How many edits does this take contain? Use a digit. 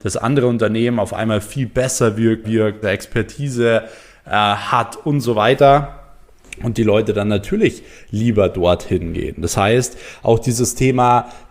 2